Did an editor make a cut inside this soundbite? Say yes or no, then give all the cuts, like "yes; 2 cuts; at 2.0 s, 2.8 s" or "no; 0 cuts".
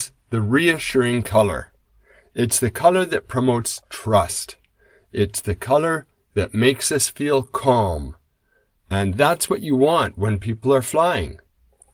no; 0 cuts